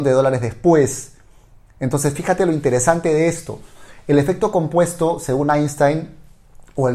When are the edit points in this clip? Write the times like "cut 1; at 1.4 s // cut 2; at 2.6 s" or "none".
none